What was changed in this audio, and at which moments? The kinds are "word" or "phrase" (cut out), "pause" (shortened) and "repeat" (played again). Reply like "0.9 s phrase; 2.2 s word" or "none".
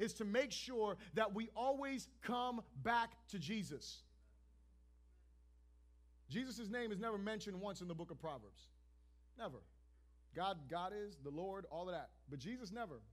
none